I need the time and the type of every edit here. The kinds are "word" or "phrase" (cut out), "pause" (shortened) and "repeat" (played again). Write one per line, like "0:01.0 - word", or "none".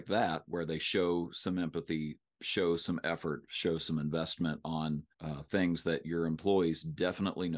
0:05.1 - pause